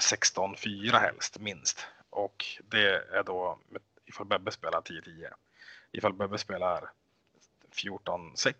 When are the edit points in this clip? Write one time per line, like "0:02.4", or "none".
none